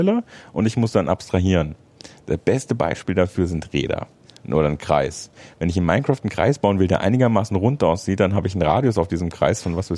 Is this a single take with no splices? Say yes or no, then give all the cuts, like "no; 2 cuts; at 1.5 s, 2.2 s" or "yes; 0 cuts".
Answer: yes; 0 cuts